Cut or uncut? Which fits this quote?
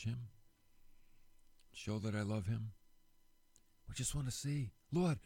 uncut